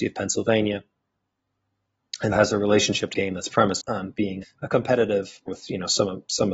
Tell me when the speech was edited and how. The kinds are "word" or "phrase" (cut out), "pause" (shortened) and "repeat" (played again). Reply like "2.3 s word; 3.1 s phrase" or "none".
2.3 s word; 3.1 s word; 3.8 s word; 4.4 s word; 5.5 s word